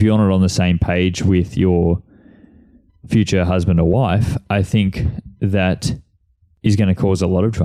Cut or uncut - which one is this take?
uncut